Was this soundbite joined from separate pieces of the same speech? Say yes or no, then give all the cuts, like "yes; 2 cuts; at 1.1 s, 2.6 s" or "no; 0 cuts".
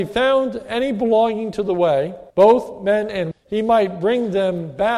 yes; 2 cuts; at 2.3 s, 3.3 s